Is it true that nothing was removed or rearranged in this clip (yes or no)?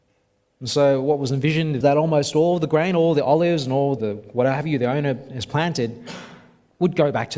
no